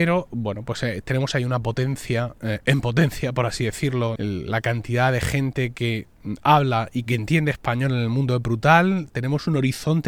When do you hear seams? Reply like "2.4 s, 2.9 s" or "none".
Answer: 4.2 s